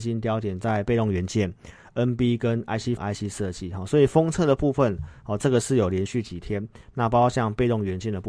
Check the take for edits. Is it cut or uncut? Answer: cut